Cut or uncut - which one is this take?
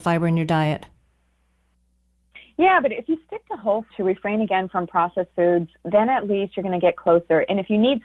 cut